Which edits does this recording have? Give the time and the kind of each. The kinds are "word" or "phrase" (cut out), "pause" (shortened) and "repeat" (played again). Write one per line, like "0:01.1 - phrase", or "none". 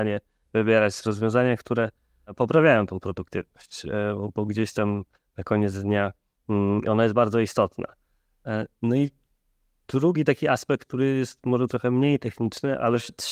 none